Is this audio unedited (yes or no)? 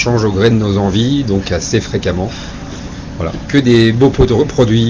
yes